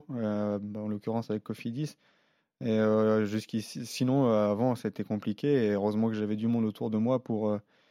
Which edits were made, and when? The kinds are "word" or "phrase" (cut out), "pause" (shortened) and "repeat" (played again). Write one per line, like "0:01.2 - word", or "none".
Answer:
none